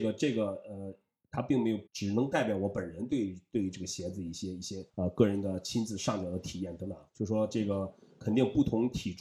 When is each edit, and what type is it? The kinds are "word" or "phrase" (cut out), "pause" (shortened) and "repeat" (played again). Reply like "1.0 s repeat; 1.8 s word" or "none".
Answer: 1.9 s pause; 4.9 s pause; 7.1 s pause